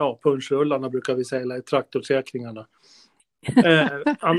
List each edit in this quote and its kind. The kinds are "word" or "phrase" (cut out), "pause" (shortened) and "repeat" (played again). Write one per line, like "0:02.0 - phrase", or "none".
none